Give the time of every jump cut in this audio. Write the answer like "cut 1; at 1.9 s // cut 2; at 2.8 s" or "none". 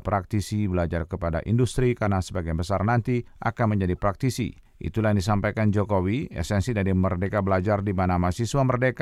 none